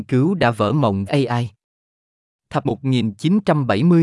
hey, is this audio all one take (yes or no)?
no